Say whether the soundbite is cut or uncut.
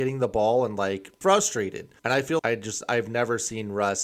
cut